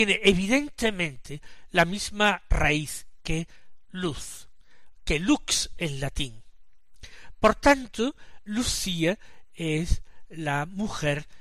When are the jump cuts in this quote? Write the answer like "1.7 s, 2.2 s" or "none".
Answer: none